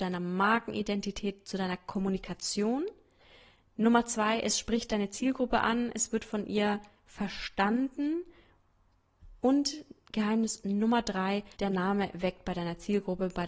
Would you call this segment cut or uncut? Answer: cut